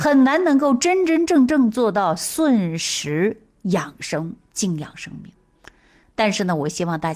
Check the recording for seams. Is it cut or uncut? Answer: uncut